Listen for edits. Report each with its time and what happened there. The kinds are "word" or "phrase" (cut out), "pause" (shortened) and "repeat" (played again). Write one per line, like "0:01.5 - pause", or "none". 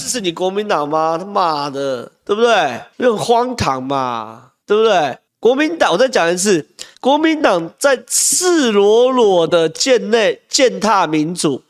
0:02.9 - pause
0:04.6 - pause
0:05.3 - pause
0:06.9 - pause